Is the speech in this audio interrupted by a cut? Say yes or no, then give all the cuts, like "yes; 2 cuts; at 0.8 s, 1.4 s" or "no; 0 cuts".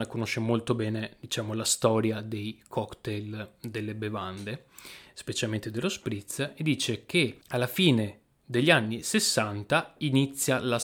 yes; 1 cut; at 7.4 s